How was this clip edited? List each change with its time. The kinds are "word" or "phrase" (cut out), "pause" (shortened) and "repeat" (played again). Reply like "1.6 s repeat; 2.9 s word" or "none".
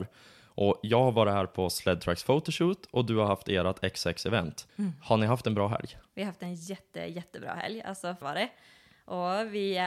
4.7 s pause; 8.2 s phrase